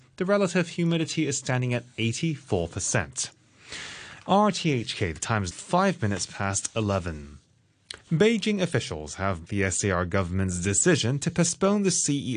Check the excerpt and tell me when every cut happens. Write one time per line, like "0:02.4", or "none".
0:05.5
0:08.0
0:09.5